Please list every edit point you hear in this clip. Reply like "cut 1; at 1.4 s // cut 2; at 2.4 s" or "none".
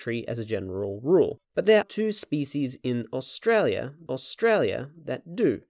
cut 1; at 1.4 s // cut 2; at 1.8 s // cut 3; at 4.1 s